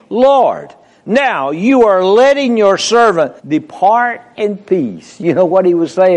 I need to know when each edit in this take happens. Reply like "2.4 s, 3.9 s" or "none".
3.4 s